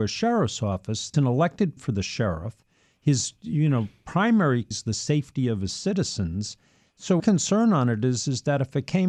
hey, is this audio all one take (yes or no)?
no